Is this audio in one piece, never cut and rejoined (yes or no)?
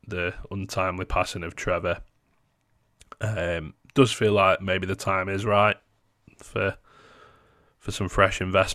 yes